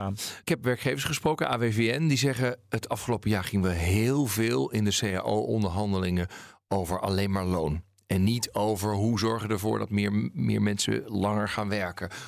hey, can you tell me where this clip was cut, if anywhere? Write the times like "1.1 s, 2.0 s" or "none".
none